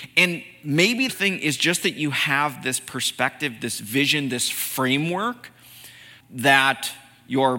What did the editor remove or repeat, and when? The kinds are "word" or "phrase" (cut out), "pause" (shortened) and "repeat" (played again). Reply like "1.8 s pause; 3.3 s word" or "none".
1.1 s phrase; 6.2 s word